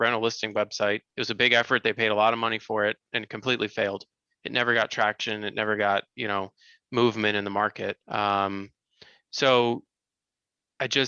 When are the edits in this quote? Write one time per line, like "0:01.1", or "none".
0:01.1
0:06.1
0:08.0